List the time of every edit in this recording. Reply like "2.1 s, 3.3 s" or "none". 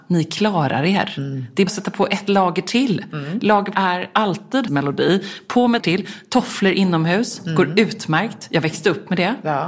1.7 s, 3.7 s, 4.7 s, 5.8 s